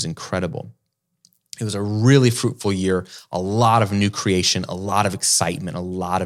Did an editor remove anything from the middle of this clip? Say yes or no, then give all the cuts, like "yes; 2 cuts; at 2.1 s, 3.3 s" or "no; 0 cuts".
no; 0 cuts